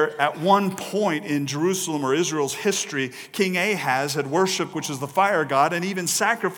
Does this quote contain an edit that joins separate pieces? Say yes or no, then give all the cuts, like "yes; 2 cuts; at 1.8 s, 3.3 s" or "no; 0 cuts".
yes; 1 cut; at 4.7 s